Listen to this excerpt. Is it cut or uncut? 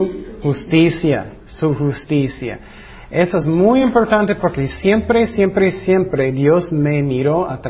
uncut